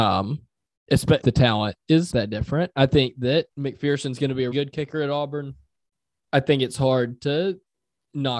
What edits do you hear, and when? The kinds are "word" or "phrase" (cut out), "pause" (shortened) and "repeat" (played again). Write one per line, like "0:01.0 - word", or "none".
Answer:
0:01.2 - word
0:02.1 - word
0:03.5 - pause
0:04.5 - word
0:06.3 - word